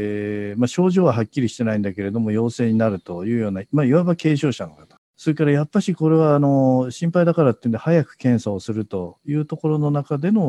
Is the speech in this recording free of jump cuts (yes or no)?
no